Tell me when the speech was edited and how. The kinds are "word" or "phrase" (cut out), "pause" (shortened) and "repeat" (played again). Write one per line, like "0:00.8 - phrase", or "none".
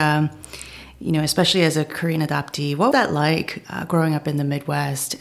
0:02.9 - word